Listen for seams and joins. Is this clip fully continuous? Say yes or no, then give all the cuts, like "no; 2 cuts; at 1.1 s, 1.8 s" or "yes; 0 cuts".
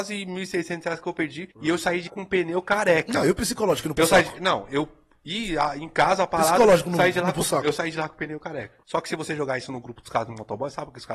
no; 3 cuts; at 1.5 s, 2.1 s, 8.8 s